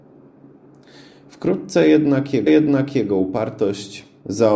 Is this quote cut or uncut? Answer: cut